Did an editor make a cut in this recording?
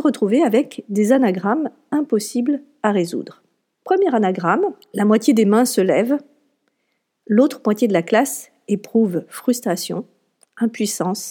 no; 0 cuts

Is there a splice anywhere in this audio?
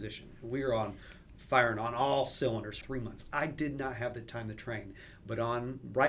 yes; 1 cut; at 2.8 s

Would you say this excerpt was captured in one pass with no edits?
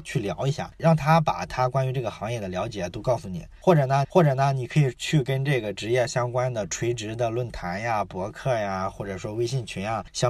no; 1 cut; at 4.0 s

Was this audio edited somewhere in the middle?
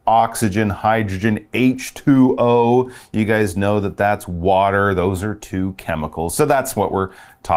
no; 0 cuts

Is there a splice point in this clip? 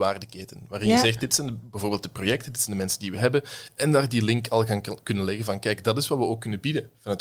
no; 0 cuts

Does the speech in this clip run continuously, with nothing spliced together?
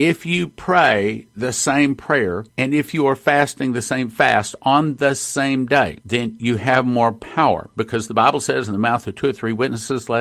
no; 2 cuts; at 2.5 s, 6.0 s

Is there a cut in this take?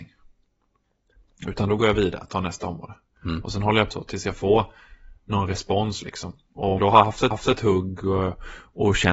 yes; 3 cuts; at 3.9 s, 6.8 s, 7.3 s

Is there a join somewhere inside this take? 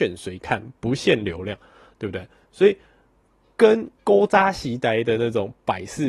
yes; 1 cut; at 4.0 s

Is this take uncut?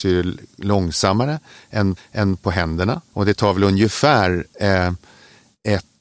no; 2 cuts; at 2.0 s, 3.1 s

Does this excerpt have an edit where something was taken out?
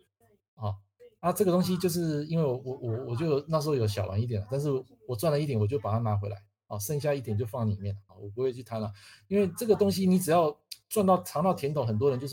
no; 0 cuts

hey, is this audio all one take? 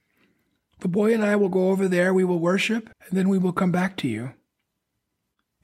no; 1 cut; at 2.9 s

